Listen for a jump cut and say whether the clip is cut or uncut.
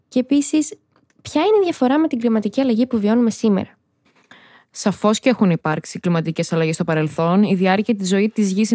uncut